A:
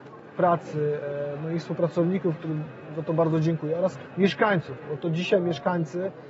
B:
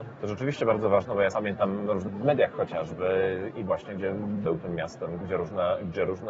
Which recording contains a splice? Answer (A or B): B